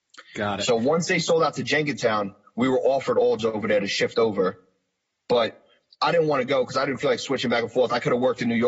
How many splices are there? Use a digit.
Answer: 1